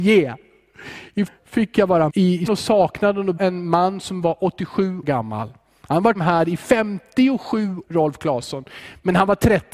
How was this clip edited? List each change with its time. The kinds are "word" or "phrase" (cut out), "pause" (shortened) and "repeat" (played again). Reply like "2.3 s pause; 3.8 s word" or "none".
1.3 s word; 2.1 s word; 2.5 s word; 3.4 s word; 5.0 s word; 6.1 s word; 7.8 s word